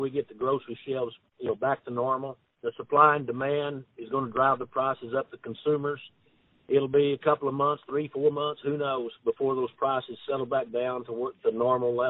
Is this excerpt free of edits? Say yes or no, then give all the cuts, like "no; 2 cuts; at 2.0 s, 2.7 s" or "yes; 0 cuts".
yes; 0 cuts